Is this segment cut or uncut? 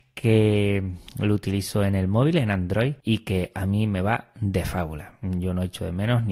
cut